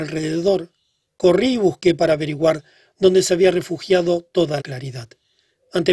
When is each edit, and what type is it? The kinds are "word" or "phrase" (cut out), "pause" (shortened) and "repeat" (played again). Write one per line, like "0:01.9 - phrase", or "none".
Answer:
0:04.6 - word

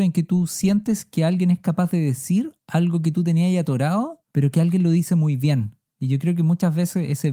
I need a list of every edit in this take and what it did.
0:02.6 - pause
0:04.3 - pause

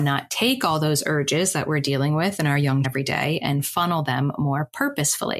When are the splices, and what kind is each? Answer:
0:02.8 - word

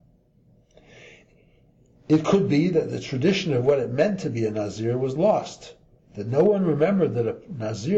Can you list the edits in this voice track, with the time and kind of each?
0:06.0 - pause

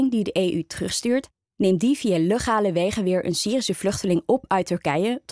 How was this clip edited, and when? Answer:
none

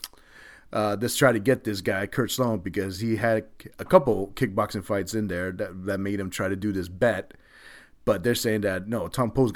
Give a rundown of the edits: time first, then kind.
none

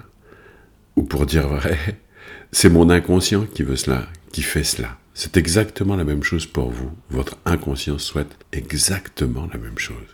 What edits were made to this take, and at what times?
0:08.4 - pause

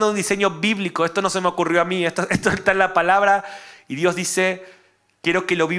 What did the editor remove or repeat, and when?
none

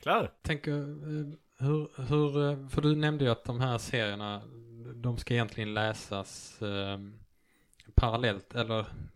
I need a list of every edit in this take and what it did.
none

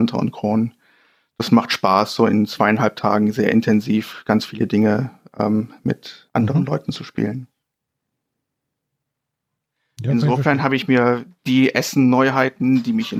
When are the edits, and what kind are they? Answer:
0:06.3 - pause

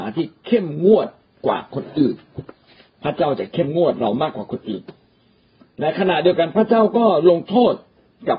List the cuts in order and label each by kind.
none

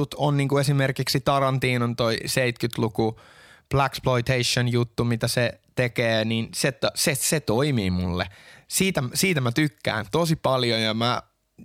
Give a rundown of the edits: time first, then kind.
none

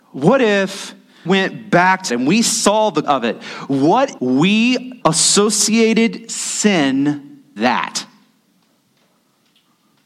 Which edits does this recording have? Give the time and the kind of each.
0:01.2 - word
0:02.1 - word
0:03.0 - word
0:04.2 - word
0:05.0 - word
0:07.6 - word

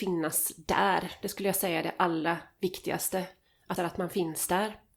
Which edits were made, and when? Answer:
0:03.8 - phrase

